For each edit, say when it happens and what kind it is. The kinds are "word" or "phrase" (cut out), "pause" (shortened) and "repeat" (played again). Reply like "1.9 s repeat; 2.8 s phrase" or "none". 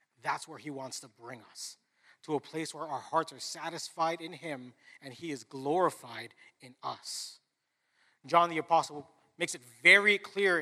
none